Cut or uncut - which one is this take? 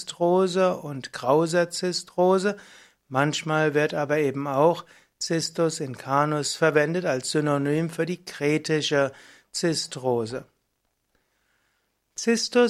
uncut